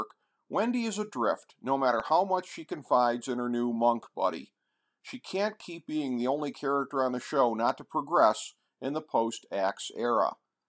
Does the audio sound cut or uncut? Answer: uncut